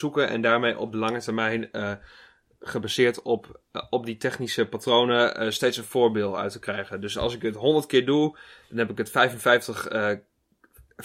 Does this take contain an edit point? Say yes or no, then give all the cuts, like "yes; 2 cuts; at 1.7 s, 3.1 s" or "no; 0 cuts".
no; 0 cuts